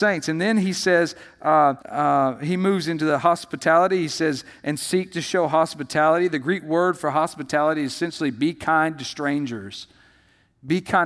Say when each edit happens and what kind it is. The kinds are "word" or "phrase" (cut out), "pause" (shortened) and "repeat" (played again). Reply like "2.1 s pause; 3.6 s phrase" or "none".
1.8 s pause